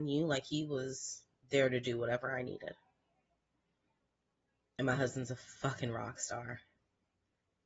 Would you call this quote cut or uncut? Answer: uncut